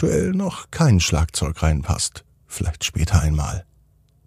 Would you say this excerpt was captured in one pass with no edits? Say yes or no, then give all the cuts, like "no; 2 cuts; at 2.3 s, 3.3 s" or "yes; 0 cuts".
yes; 0 cuts